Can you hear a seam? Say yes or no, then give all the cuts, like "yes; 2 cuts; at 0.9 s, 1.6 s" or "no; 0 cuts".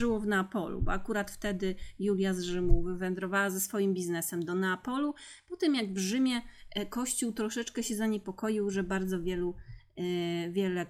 no; 0 cuts